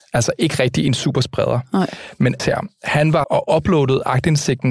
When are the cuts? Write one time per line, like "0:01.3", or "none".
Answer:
0:02.4
0:03.2

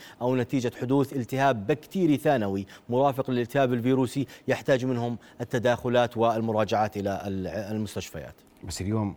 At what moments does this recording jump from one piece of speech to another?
none

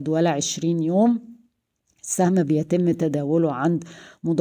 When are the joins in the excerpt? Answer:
none

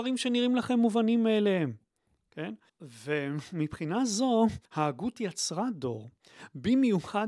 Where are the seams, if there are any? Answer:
0:02.7
0:04.7

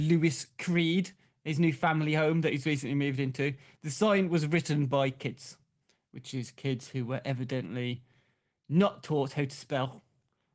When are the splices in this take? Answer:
none

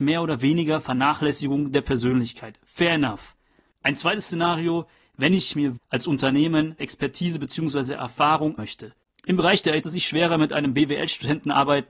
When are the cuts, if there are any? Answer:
0:05.8
0:06.8
0:08.6
0:09.8

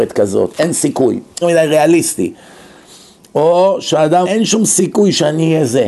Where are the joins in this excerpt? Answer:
0:01.4
0:04.3

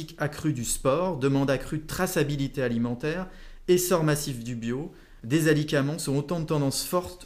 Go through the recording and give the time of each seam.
none

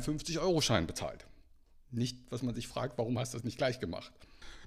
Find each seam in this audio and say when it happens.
none

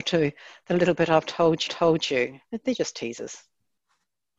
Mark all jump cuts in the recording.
0:01.7

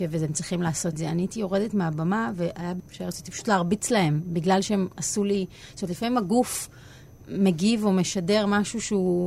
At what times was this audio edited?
0:00.9
0:02.8

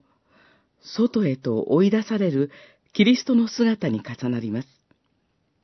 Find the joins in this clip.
none

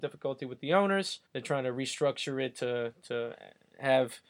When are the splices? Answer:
0:01.2

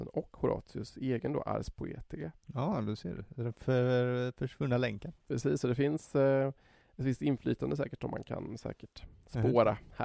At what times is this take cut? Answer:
0:05.2

